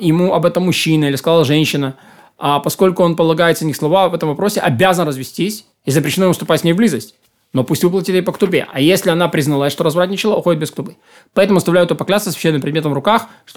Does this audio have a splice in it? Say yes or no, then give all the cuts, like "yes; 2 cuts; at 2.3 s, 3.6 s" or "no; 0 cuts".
no; 0 cuts